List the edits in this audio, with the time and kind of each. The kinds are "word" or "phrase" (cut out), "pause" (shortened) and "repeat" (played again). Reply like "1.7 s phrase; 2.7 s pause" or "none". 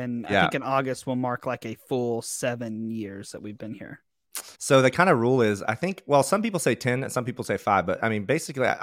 4.5 s pause

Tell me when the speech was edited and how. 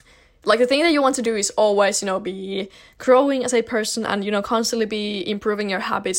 none

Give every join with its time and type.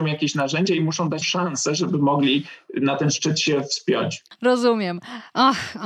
1.2 s word

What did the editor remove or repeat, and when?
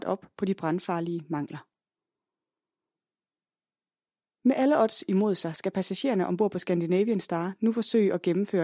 none

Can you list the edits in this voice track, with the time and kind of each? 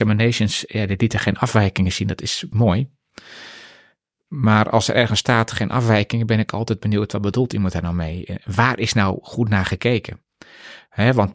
2.5 s word

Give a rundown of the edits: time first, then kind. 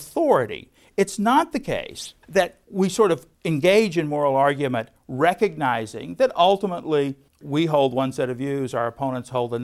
2.2 s pause; 3.3 s pause

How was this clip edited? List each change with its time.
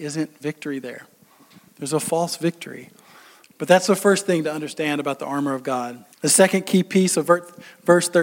6.1 s pause

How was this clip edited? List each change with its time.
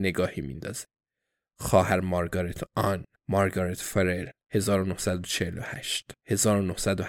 3.1 s pause; 6.2 s pause

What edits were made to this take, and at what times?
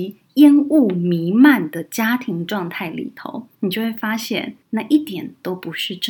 3.5 s pause; 4.6 s pause

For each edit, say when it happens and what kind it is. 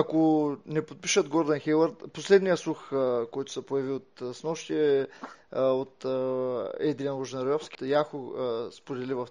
7.7 s word

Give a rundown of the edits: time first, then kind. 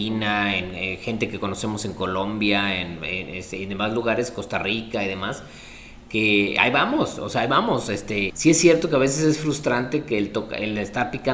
8.3 s word

